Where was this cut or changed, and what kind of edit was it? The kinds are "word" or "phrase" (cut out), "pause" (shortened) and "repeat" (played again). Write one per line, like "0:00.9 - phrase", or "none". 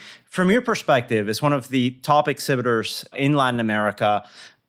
none